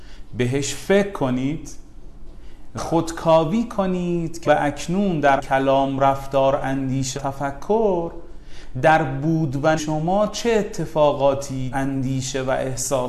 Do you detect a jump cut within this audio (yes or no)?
yes